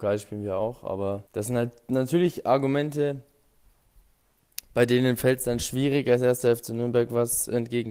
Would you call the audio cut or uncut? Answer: cut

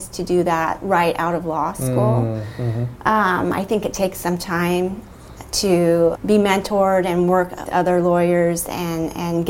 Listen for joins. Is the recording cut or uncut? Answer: cut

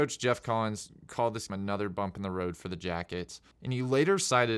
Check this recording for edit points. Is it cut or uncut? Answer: cut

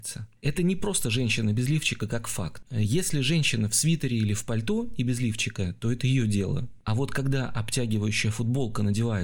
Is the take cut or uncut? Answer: uncut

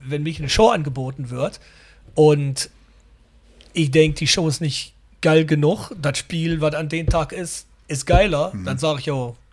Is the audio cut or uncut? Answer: uncut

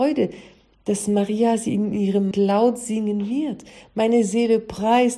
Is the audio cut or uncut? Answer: cut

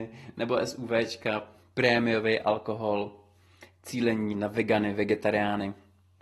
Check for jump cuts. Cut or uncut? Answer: uncut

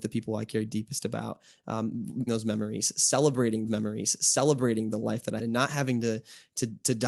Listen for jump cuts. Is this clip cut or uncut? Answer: cut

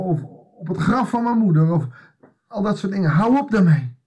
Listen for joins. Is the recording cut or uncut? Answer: uncut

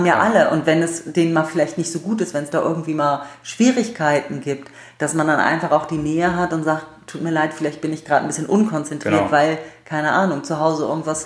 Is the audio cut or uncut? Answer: uncut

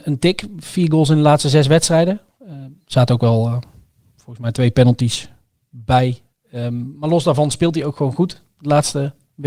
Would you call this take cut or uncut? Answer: uncut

